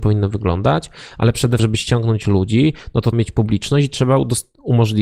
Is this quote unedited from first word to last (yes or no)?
no